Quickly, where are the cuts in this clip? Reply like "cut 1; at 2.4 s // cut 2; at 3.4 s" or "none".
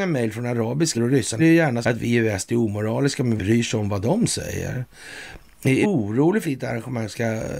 cut 1; at 0.9 s // cut 2; at 1.4 s // cut 3; at 1.8 s // cut 4; at 3.4 s // cut 5; at 5.8 s // cut 6; at 6.4 s